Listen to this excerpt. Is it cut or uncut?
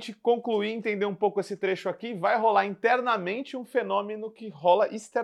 uncut